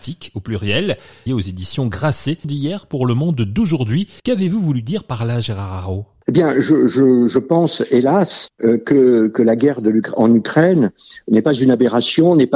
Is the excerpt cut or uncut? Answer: cut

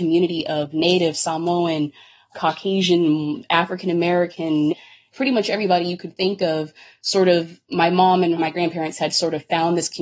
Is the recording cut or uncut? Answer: uncut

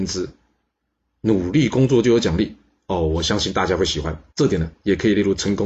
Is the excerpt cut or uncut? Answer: cut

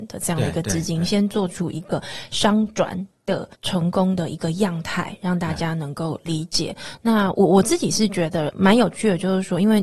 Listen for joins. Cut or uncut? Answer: cut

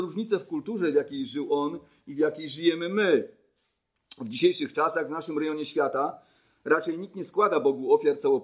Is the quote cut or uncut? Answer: uncut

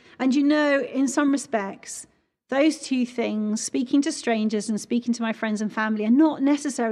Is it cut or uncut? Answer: uncut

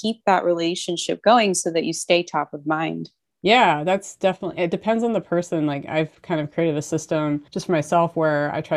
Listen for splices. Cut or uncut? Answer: cut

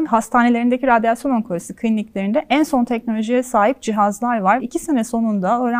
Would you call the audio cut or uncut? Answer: cut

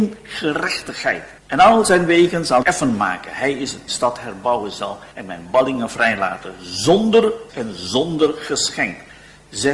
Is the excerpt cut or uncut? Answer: cut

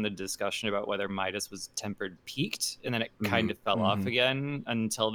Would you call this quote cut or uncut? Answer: uncut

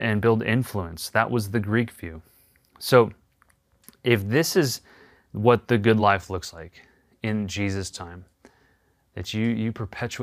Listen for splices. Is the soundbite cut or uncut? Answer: uncut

